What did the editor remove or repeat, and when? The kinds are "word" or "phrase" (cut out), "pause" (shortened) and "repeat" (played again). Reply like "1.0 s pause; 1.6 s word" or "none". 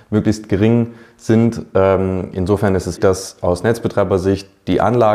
3.0 s word